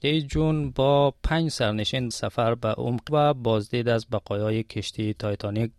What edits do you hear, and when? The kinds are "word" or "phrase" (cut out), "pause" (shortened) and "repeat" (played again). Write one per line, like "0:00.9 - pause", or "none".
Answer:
0:02.1 - word
0:03.1 - word